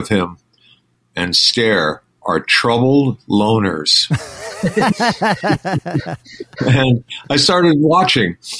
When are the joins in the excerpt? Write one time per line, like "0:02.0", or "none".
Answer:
0:02.1